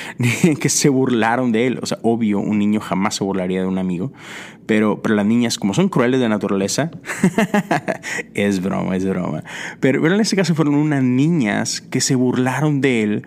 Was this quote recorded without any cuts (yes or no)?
yes